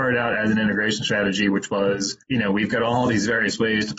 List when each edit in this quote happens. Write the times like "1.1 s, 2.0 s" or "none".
2.2 s